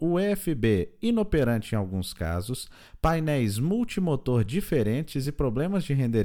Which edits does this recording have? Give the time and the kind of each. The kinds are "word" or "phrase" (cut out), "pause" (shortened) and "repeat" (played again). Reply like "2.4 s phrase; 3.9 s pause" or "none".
none

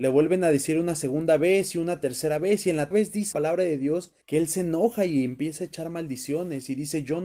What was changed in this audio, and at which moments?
2.9 s word; 3.3 s word; 4.2 s pause

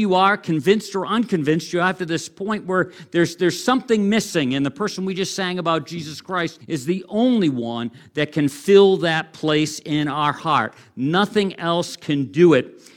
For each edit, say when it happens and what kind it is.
6.6 s pause

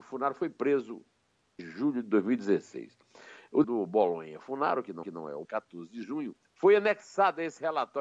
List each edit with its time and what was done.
1.6 s word; 3.6 s word; 5.0 s repeat; 5.4 s phrase; 6.4 s pause

